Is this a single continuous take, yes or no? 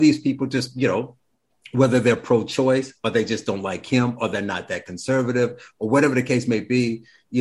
yes